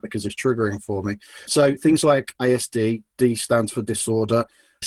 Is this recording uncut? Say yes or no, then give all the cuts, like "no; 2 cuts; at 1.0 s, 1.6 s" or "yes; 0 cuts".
yes; 0 cuts